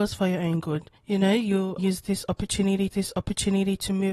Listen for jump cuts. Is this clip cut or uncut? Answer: cut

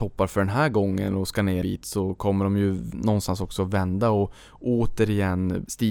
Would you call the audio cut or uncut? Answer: cut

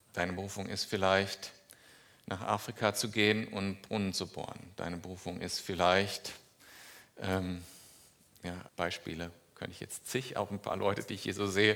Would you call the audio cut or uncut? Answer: cut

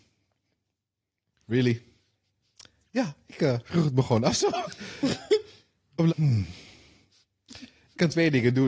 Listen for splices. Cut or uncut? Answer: cut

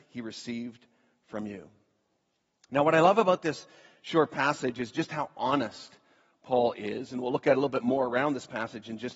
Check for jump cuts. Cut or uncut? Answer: uncut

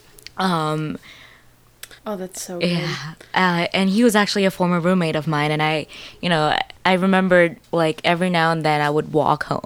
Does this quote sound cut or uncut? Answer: cut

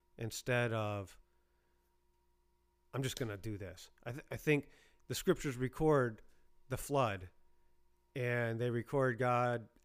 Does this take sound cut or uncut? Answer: uncut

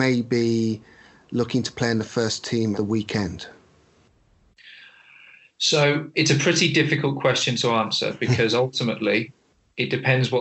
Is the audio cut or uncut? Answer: cut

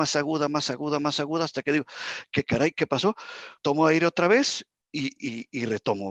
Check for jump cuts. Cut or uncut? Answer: cut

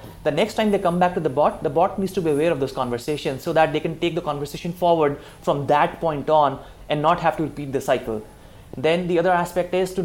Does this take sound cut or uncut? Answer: uncut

